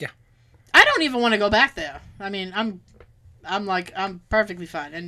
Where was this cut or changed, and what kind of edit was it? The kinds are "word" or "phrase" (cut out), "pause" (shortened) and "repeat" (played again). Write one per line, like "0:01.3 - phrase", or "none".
none